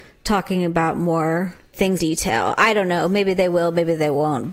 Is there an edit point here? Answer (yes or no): yes